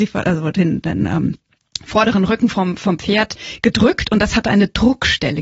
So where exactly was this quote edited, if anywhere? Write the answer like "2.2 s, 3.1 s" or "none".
none